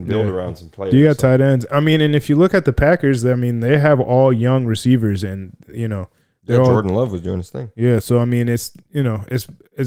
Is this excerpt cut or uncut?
uncut